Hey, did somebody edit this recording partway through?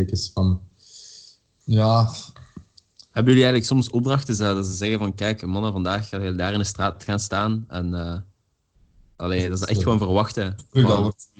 no; 0 cuts

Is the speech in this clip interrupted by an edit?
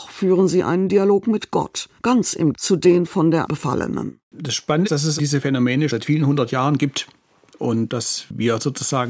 yes; 7 cuts; at 2.0 s, 2.5 s, 3.5 s, 4.2 s, 4.9 s, 5.2 s, 5.9 s

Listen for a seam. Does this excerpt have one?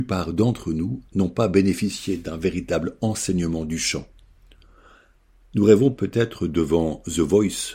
yes; 1 cut; at 1.1 s

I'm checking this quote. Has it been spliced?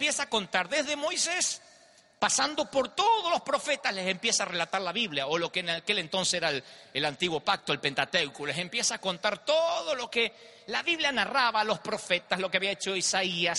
no; 0 cuts

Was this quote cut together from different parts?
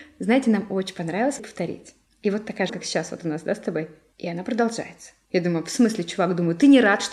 yes; 2 cuts; at 1.4 s, 2.7 s

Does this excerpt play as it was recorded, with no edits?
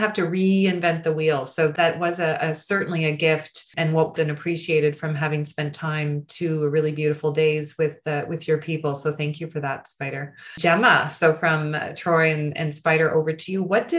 no; 1 cut; at 4.2 s

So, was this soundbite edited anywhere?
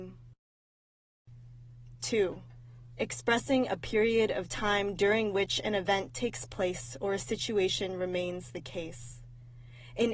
no; 0 cuts

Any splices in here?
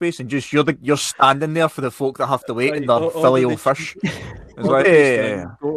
yes; 1 cut; at 4.8 s

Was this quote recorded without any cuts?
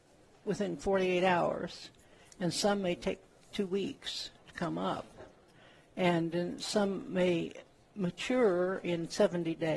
yes; 0 cuts

